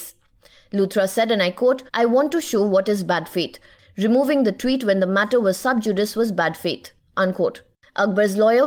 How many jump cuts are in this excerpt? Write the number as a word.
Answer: one